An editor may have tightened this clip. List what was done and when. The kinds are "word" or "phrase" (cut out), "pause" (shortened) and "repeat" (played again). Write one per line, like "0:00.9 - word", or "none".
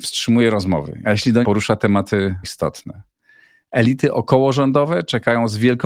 0:01.0 - phrase
0:01.4 - phrase
0:02.4 - word